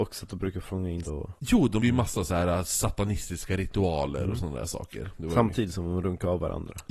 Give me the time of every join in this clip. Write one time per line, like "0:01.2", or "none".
0:01.0
0:01.4
0:01.8